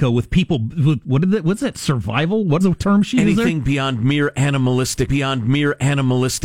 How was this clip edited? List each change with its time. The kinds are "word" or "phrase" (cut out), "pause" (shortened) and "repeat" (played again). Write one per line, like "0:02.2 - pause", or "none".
0:02.6 - word
0:05.1 - repeat